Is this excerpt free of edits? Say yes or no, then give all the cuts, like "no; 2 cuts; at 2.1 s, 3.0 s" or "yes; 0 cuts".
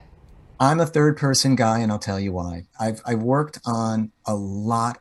yes; 0 cuts